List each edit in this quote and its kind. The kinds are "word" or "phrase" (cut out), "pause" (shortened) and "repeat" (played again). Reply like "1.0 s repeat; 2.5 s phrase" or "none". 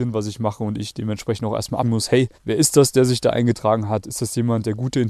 1.8 s word; 2.3 s pause